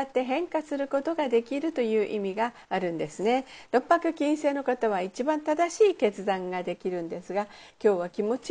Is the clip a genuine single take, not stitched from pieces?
no; 1 cut; at 2.6 s

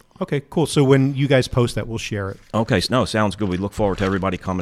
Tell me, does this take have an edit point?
yes; 1 cut; at 2.5 s

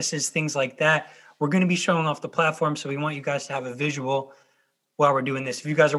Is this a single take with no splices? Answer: yes; 0 cuts

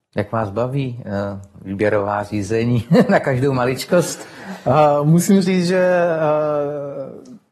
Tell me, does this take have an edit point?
no; 0 cuts

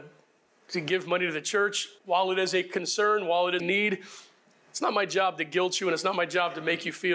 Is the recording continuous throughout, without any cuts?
no; 2 cuts; at 2.0 s, 3.6 s

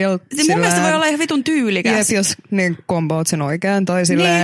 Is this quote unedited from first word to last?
yes; 0 cuts

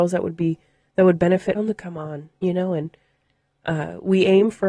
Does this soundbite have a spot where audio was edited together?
yes; 1 cut; at 1.5 s

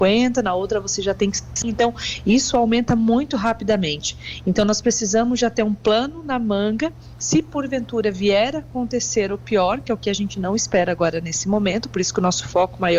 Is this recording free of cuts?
yes; 0 cuts

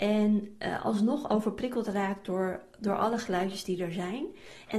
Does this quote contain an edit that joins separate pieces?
no; 0 cuts

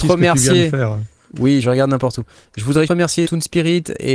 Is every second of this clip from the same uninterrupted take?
no; 3 cuts; at 1.6 s, 2.9 s, 3.2 s

